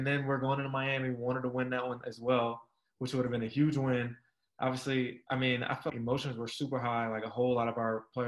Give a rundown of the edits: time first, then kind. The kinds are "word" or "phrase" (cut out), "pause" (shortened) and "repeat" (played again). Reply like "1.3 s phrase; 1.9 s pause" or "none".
5.9 s word